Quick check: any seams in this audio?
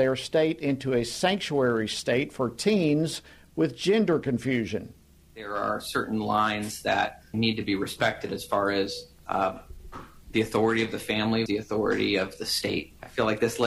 yes; 3 cuts; at 7.3 s, 9.2 s, 11.5 s

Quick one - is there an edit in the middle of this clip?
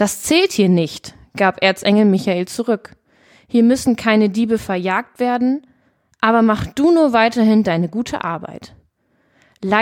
no; 0 cuts

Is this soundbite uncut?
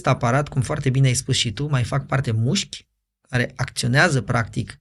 no; 1 cut; at 2.2 s

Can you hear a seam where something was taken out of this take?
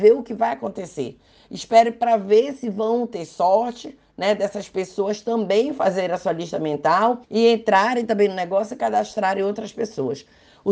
yes; 1 cut; at 7.2 s

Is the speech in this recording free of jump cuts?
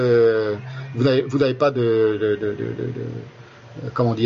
yes; 0 cuts

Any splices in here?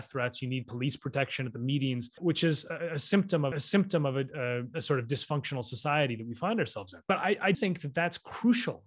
yes; 4 cuts; at 2.2 s, 3.5 s, 7.0 s, 7.5 s

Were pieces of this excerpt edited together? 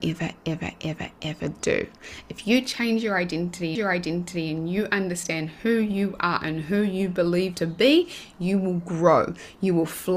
yes; 2 cuts; at 3.8 s, 7.5 s

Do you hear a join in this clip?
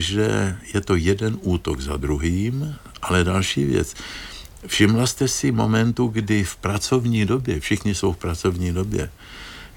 no; 0 cuts

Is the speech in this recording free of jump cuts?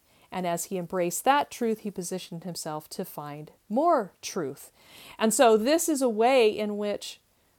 yes; 0 cuts

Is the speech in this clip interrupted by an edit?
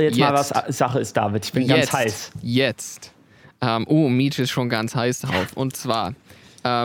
no; 0 cuts

